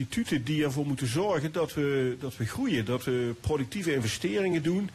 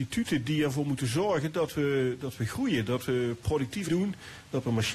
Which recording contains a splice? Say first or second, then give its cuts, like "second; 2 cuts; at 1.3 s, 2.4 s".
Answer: second; 1 cut; at 3.9 s